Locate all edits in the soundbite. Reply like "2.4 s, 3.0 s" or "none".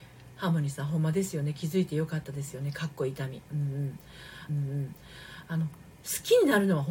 4.5 s